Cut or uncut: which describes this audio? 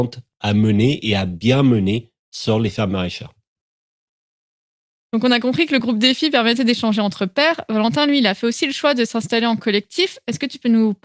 uncut